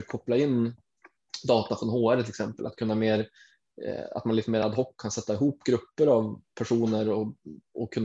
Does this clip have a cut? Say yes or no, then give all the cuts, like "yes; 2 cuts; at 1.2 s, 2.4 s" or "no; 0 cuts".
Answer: no; 0 cuts